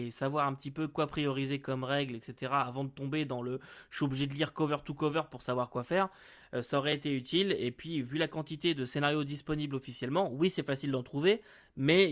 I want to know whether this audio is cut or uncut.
uncut